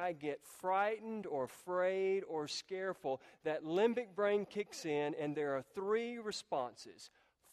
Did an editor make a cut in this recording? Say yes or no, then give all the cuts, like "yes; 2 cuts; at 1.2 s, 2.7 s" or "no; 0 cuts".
no; 0 cuts